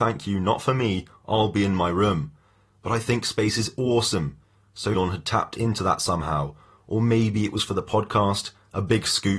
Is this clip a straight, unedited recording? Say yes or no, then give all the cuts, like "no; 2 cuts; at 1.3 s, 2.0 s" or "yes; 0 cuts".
no; 1 cut; at 4.9 s